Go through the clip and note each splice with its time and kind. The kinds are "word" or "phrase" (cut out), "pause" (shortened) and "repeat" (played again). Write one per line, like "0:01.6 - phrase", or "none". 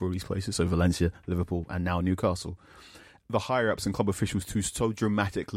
none